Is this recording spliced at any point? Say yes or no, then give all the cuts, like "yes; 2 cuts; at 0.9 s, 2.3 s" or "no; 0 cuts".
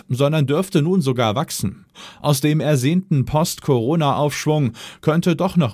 no; 0 cuts